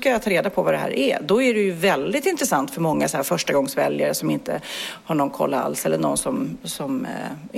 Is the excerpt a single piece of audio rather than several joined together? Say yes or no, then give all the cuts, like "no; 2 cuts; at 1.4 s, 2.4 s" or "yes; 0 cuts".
yes; 0 cuts